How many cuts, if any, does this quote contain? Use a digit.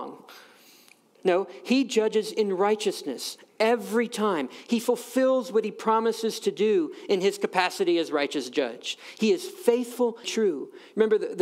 1